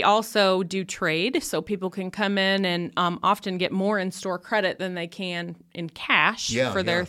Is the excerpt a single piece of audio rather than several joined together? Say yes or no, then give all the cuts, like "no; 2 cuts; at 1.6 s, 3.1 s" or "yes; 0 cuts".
yes; 0 cuts